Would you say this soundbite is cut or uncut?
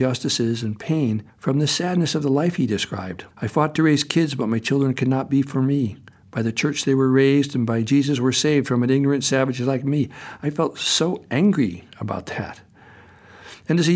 cut